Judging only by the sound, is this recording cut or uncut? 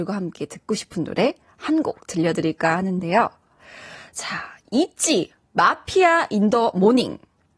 uncut